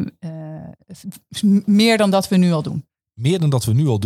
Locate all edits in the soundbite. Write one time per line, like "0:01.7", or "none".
none